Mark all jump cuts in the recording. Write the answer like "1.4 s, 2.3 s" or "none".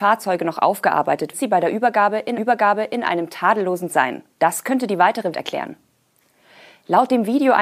1.3 s, 2.4 s, 3.9 s, 4.3 s, 5.3 s